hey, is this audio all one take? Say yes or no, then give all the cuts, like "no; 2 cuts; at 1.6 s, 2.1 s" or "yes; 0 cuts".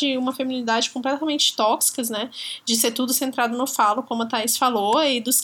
yes; 0 cuts